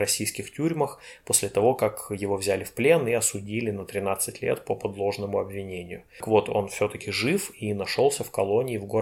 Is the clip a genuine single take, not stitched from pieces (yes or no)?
yes